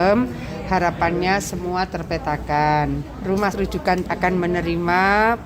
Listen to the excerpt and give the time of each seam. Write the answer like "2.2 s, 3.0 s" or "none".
3.5 s, 4.0 s

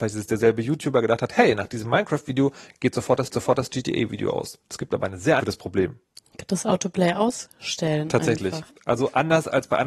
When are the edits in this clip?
3.3 s, 4.6 s, 5.4 s

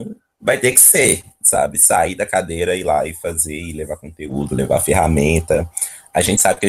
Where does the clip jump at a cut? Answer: none

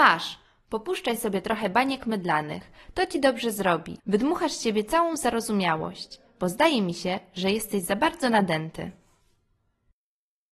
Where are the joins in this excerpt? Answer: 4.0 s

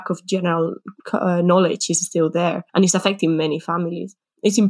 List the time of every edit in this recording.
1.0 s, 2.7 s

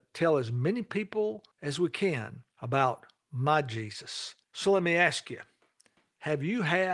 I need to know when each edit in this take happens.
1.5 s, 2.5 s, 4.4 s

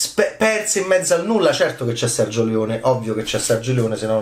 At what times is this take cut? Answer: none

